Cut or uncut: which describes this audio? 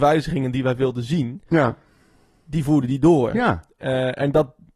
uncut